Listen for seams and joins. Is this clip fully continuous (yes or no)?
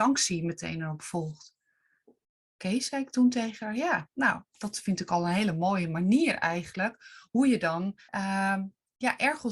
no